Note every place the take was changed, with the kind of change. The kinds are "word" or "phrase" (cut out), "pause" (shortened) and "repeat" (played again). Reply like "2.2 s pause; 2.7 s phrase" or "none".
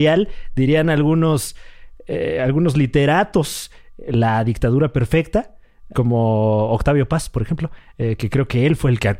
5.9 s word

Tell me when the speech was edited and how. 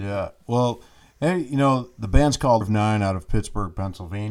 2.6 s word

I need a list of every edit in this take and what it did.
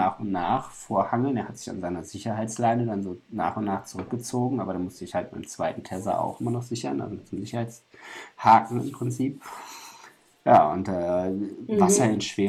none

